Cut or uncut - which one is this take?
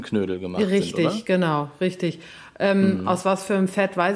uncut